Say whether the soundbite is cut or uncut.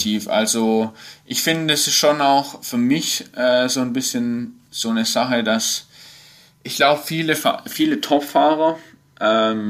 uncut